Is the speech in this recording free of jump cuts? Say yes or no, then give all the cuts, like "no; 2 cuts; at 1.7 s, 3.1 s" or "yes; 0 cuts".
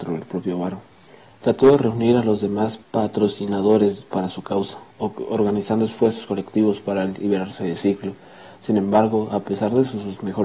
no; 3 cuts; at 1.1 s, 2.8 s, 4.9 s